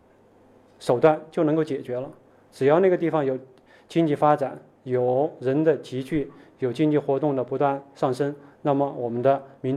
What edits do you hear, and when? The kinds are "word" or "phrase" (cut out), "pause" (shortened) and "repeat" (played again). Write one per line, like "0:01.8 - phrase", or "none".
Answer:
none